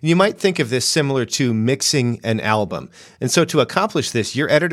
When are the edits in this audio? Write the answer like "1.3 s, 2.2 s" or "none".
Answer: none